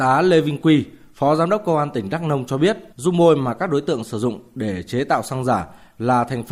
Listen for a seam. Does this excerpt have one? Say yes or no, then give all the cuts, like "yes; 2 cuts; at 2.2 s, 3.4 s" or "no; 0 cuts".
yes; 1 cut; at 2.9 s